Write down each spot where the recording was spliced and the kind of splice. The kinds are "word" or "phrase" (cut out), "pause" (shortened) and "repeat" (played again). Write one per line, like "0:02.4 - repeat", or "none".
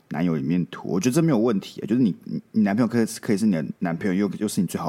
0:03.8 - pause